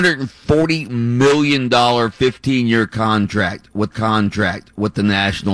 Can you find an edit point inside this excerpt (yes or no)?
yes